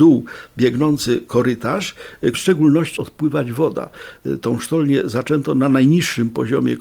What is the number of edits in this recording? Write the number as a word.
two